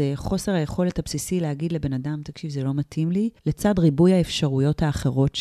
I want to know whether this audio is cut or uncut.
cut